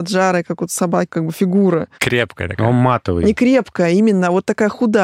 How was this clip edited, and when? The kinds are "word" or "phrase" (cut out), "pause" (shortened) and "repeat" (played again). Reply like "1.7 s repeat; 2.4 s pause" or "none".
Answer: 1.1 s word